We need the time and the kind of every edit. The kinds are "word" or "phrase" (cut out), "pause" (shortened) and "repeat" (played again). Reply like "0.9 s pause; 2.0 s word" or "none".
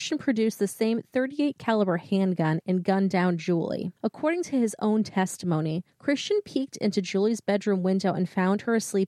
4.0 s pause